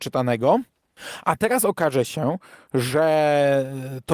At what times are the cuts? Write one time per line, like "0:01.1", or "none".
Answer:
none